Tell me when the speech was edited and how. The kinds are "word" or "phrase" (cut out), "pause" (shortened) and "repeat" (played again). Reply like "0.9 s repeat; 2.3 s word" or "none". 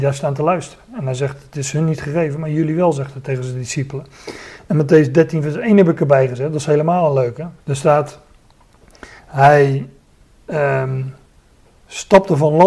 7.6 s pause; 11.4 s pause